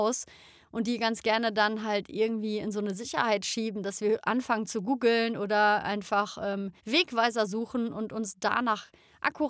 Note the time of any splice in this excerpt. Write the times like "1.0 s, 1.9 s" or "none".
6.8 s

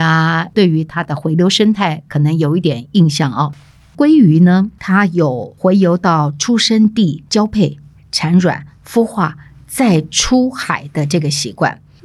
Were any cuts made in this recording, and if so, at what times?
none

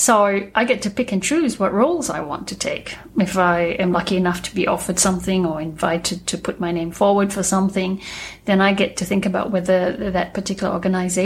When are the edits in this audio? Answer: none

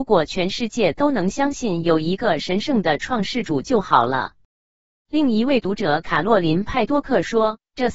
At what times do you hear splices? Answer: none

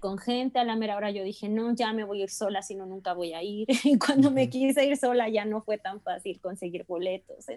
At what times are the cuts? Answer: none

